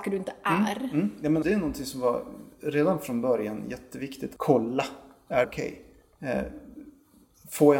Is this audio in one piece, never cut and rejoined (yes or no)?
no